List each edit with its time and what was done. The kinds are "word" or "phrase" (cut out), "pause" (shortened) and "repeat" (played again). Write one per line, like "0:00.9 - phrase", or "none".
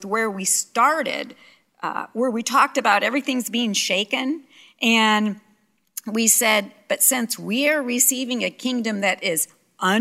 none